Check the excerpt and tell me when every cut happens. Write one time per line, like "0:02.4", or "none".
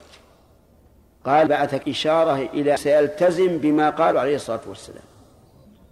0:01.5
0:01.8
0:02.8
0:04.1

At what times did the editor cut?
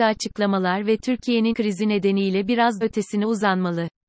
0:01.5
0:02.8

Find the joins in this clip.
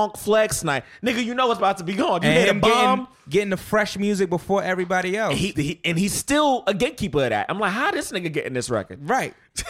0:05.5

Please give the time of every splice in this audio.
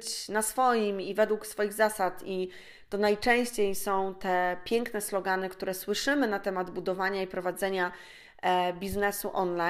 none

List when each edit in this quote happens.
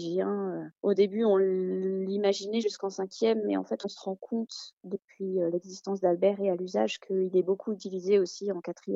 none

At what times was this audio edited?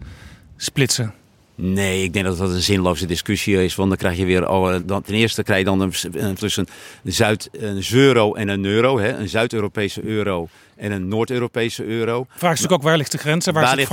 0:04.8
0:06.4

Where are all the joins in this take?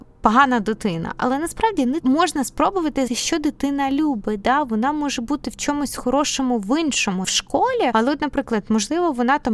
0:02.0
0:03.1
0:07.2

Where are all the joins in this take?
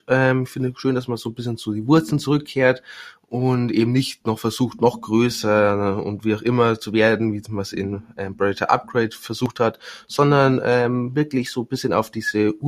none

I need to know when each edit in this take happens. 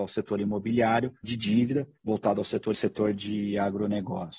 0:01.2
0:02.0
0:02.7

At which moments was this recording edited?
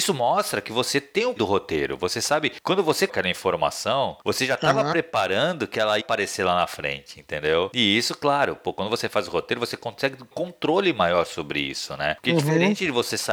0:01.4
0:03.1
0:06.0
0:10.3

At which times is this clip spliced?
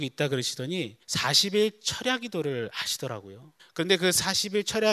0:01.0
0:03.6

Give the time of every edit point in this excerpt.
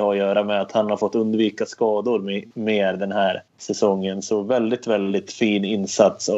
0:02.5
0:03.5

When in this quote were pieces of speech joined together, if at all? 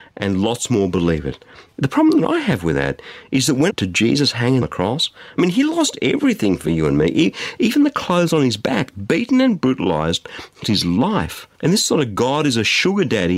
0:03.7
0:04.6
0:10.6
0:11.5

